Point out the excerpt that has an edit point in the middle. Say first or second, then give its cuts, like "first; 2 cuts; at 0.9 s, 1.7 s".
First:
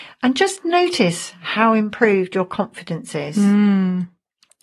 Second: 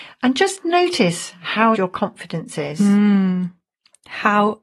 second; 1 cut; at 1.7 s